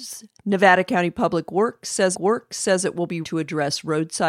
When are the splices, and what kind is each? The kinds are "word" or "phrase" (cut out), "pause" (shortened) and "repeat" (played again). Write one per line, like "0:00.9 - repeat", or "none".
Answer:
0:02.1 - repeat
0:03.2 - word